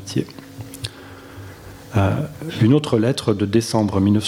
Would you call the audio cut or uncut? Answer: uncut